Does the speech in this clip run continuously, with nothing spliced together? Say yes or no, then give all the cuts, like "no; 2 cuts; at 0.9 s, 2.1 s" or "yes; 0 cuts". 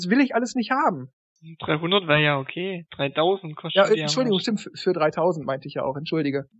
yes; 0 cuts